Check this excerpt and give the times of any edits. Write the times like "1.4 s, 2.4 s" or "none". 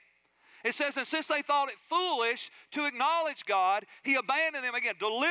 none